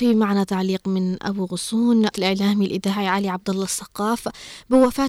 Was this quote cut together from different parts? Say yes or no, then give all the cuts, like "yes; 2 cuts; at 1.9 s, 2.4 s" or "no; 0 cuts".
yes; 1 cut; at 2.1 s